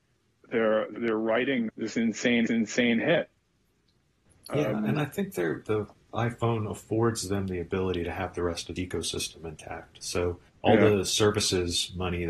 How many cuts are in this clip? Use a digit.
6